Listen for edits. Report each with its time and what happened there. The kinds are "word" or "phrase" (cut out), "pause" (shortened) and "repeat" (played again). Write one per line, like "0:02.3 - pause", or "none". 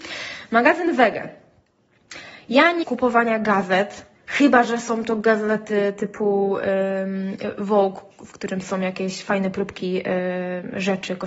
0:02.8 - phrase
0:04.1 - pause